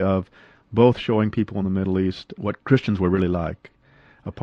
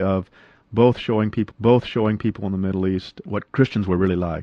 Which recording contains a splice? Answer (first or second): second